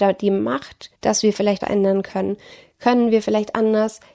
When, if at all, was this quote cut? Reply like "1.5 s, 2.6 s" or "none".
0.9 s, 1.6 s